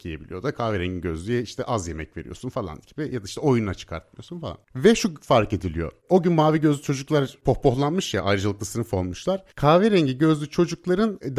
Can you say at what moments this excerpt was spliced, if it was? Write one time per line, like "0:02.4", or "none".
0:09.5